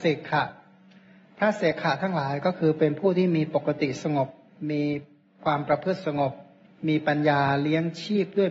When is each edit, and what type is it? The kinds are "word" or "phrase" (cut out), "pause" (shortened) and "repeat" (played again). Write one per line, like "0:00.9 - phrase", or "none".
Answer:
none